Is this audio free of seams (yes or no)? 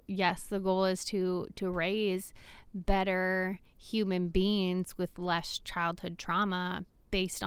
yes